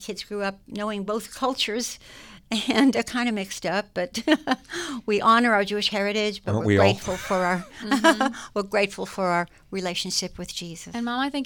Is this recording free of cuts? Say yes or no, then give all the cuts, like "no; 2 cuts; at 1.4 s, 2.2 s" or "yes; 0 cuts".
no; 1 cut; at 2.9 s